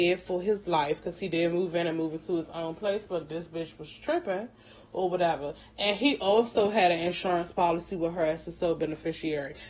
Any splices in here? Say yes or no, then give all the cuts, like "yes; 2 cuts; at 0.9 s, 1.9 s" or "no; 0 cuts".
no; 0 cuts